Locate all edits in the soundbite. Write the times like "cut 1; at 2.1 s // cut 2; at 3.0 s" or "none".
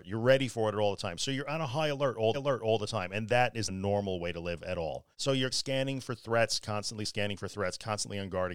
cut 1; at 2.3 s // cut 2; at 3.7 s // cut 3; at 5.1 s // cut 4; at 5.5 s // cut 5; at 6.6 s